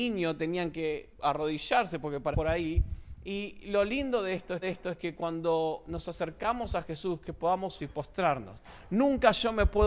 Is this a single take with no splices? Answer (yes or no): no